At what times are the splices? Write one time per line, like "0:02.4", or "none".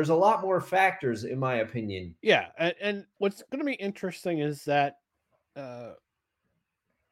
0:02.2

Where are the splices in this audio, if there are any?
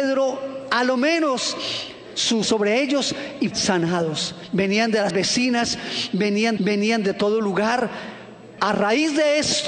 0:02.4
0:03.5
0:05.1
0:06.6
0:08.6

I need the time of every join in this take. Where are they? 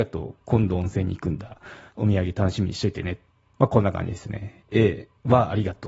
0:01.9
0:03.3

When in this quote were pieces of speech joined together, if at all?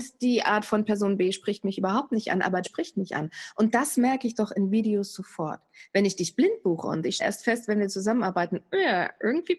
0:02.6
0:07.2

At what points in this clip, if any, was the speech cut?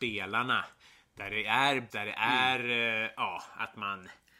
0:01.9

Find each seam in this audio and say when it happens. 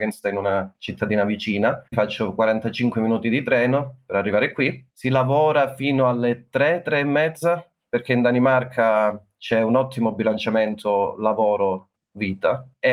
0:01.9

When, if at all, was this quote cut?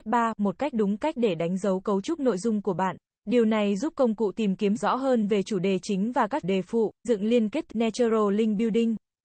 0:03.1
0:04.8
0:06.4
0:07.0
0:07.7

